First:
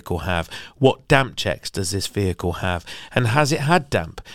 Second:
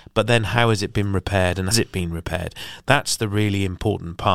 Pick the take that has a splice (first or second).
second